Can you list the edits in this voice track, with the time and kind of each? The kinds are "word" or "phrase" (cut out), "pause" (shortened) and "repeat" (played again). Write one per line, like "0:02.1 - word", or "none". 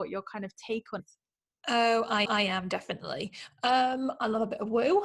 0:01.0 - word
0:02.3 - repeat